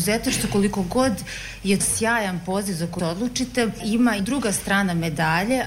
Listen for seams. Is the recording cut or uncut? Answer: cut